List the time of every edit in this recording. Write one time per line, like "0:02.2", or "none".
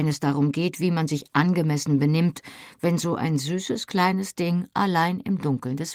none